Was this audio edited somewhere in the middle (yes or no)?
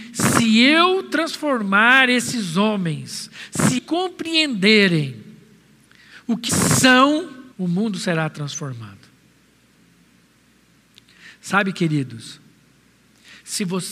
yes